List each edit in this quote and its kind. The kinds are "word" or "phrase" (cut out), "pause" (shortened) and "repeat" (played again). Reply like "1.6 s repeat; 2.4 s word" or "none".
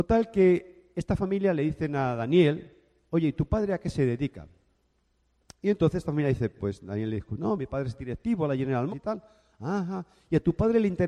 8.9 s word